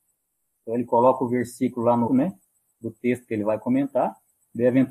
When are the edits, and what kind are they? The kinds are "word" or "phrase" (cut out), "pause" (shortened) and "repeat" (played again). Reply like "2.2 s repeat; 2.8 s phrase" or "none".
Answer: 2.1 s word